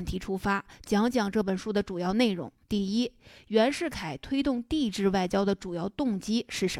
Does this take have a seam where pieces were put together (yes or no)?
yes